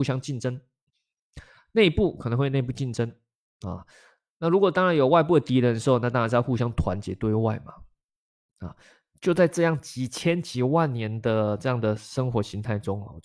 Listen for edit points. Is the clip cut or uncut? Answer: uncut